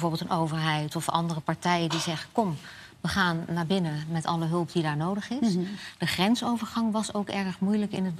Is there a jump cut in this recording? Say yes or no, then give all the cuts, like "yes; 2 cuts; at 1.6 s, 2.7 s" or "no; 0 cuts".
no; 0 cuts